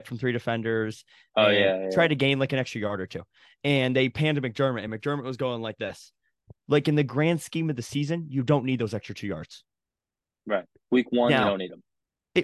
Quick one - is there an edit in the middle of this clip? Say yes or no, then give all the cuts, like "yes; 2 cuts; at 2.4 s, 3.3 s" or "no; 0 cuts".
no; 0 cuts